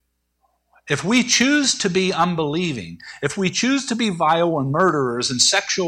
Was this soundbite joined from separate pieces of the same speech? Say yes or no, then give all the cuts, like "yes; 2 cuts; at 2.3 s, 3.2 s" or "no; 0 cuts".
no; 0 cuts